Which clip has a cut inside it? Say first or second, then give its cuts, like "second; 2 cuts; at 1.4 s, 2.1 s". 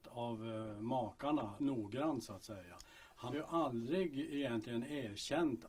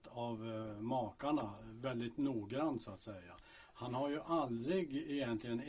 first; 2 cuts; at 1.6 s, 3.3 s